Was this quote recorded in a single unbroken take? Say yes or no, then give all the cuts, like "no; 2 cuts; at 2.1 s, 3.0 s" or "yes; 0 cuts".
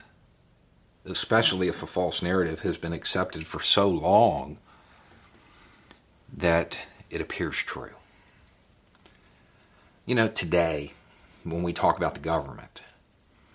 yes; 0 cuts